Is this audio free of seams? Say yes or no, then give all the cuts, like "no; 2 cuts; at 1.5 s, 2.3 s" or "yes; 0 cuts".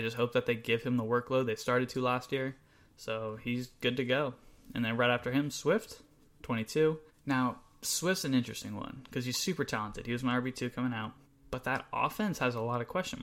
no; 2 cuts; at 7.1 s, 11.3 s